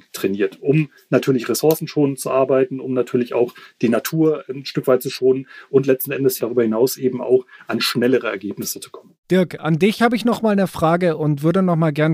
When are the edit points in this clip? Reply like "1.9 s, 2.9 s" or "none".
9.2 s